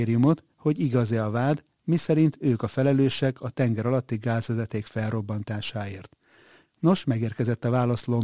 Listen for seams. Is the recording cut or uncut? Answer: uncut